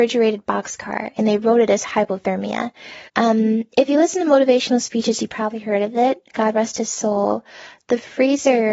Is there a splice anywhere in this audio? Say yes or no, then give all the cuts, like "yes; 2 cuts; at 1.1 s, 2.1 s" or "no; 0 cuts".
yes; 1 cut; at 3.1 s